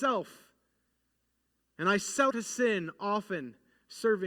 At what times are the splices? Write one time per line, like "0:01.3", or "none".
0:02.3